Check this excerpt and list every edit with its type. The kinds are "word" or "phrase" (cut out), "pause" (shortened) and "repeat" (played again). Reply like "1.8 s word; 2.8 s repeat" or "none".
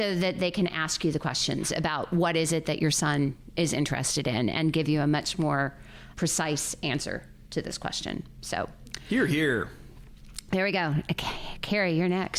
6.1 s word